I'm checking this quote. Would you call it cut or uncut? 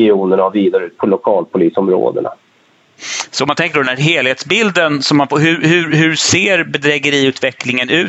uncut